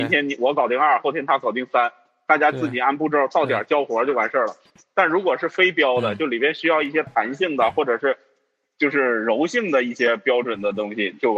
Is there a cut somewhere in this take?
no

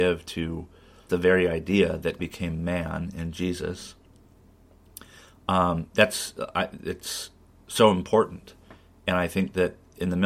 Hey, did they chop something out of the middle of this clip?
yes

